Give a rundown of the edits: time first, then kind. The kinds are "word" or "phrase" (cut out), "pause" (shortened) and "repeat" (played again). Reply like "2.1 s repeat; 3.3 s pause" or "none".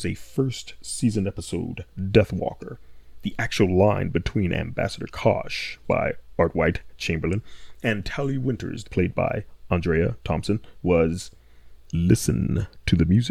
5.8 s word; 8.8 s phrase; 11.9 s word